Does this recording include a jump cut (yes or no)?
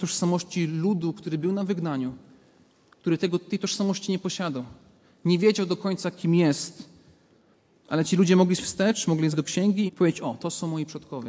yes